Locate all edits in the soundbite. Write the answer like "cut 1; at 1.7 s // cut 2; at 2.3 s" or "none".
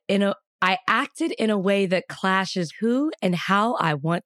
cut 1; at 2.7 s